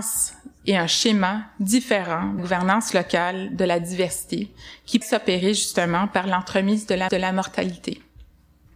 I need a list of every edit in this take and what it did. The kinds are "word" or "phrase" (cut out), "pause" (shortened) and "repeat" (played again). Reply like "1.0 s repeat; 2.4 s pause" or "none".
2.4 s word; 5.0 s word; 7.1 s repeat